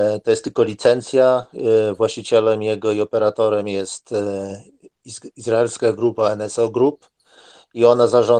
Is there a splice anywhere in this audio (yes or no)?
no